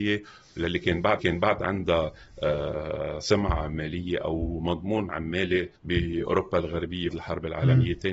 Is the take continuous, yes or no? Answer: no